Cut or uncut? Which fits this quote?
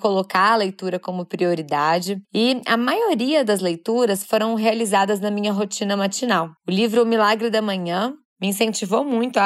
cut